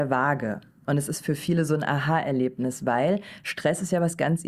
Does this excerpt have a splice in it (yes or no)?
no